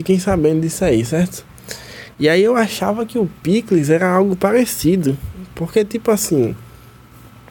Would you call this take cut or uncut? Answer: uncut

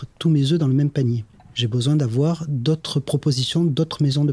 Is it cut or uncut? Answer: uncut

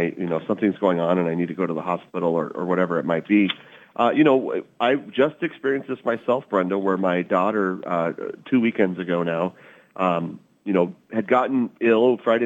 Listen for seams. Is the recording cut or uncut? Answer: uncut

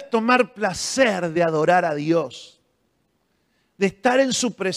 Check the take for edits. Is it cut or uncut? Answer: uncut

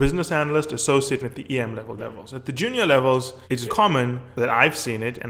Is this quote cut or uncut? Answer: cut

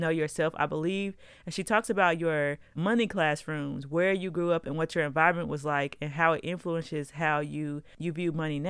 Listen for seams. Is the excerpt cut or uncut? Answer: cut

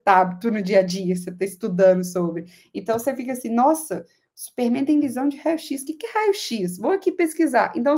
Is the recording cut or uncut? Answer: uncut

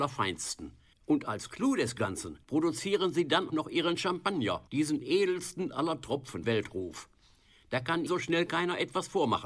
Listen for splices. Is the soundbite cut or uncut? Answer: cut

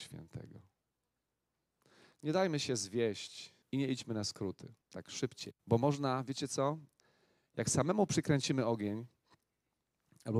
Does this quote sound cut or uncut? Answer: cut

